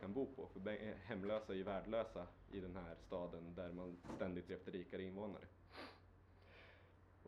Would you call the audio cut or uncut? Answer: cut